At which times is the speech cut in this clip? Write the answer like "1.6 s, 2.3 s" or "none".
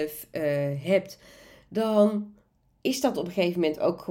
none